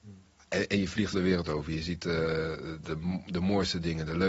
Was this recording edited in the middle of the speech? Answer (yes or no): yes